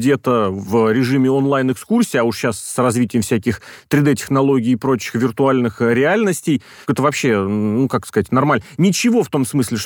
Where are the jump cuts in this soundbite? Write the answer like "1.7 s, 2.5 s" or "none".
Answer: none